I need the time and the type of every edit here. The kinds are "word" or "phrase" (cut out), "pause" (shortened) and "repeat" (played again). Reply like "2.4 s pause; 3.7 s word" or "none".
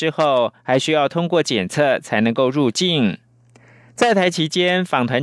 none